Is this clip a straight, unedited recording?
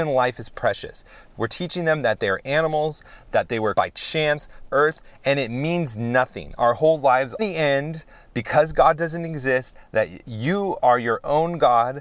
no; 3 cuts; at 3.7 s, 4.7 s, 7.4 s

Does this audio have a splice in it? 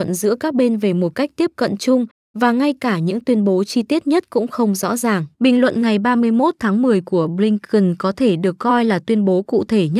yes; 1 cut; at 5.3 s

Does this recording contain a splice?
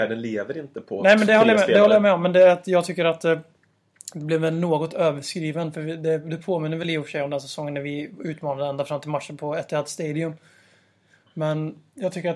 no; 0 cuts

